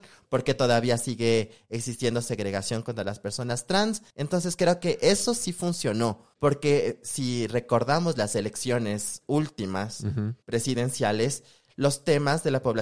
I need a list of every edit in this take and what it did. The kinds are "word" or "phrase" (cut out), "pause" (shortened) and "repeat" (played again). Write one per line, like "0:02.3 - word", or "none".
0:04.1 - pause
0:06.3 - pause
0:10.4 - pause